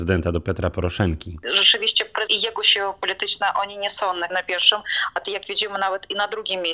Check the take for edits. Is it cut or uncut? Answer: cut